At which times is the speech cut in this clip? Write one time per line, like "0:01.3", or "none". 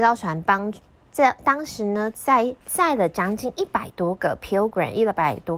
0:02.6